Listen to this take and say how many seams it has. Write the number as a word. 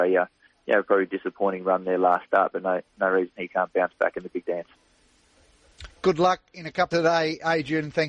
one